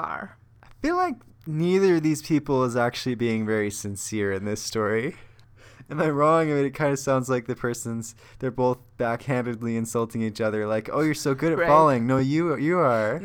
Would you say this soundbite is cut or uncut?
uncut